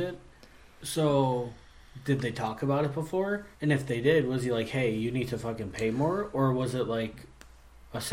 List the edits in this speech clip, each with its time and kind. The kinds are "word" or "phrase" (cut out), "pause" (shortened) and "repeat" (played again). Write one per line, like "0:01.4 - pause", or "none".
0:03.5 - pause